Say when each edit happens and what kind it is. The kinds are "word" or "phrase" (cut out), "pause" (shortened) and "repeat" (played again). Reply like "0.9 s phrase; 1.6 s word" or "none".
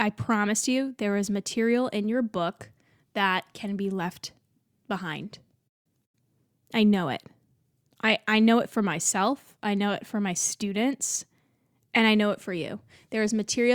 none